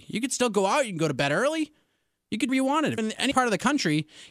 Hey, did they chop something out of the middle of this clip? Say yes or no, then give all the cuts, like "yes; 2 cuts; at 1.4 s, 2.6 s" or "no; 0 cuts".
yes; 3 cuts; at 2.5 s, 3.0 s, 3.3 s